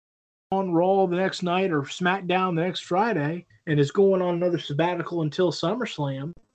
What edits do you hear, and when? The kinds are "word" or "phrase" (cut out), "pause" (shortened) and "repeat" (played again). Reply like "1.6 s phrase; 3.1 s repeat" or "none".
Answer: 3.5 s pause